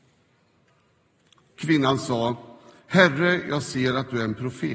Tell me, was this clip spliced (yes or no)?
no